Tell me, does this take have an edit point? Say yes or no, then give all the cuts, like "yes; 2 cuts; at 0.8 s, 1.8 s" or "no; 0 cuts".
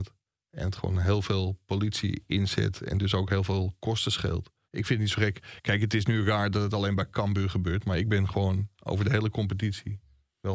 yes; 1 cut; at 4.6 s